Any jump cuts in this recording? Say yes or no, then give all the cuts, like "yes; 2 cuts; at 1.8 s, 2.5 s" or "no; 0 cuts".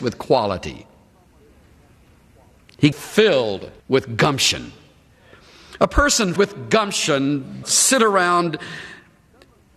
yes; 4 cuts; at 2.9 s, 3.8 s, 6.4 s, 7.6 s